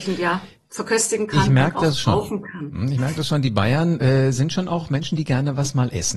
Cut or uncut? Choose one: uncut